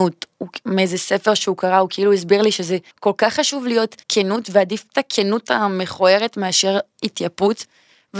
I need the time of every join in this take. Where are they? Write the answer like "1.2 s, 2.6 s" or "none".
2.9 s, 4.0 s